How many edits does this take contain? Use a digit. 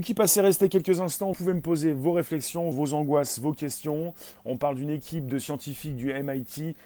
2